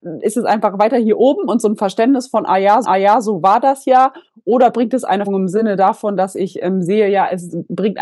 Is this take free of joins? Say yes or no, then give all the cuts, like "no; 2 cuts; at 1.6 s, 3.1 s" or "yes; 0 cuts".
no; 2 cuts; at 2.8 s, 5.3 s